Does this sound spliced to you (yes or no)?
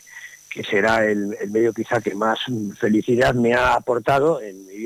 no